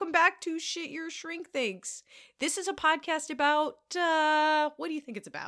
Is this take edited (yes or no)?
no